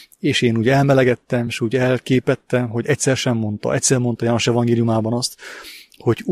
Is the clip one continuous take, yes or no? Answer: yes